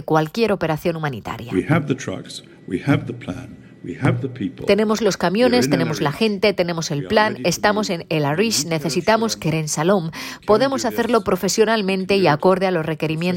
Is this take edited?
no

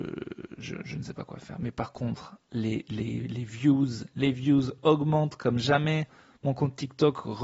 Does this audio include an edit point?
no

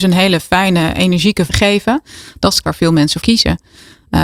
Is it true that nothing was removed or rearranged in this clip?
no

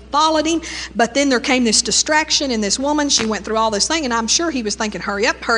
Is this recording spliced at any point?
no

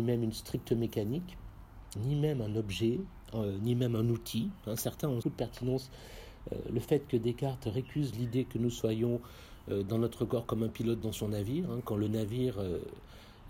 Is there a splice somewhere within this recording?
yes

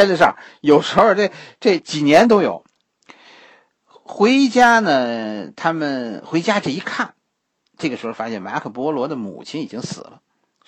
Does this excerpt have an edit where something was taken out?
no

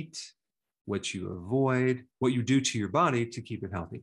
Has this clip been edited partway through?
yes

